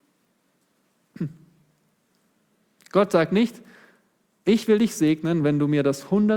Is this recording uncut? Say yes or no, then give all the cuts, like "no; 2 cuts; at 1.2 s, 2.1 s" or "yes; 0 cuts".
yes; 0 cuts